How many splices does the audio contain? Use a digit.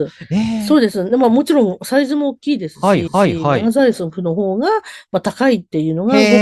1